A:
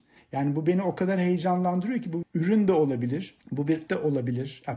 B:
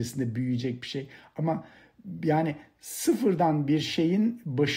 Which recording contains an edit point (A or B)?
A